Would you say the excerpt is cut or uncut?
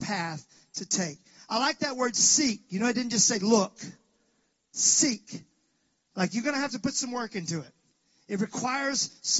uncut